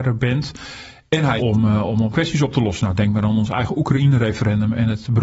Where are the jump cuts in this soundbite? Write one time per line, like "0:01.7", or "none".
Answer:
0:01.4
0:02.1